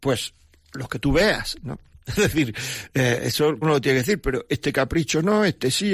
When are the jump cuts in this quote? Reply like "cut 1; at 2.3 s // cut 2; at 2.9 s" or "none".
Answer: cut 1; at 3.6 s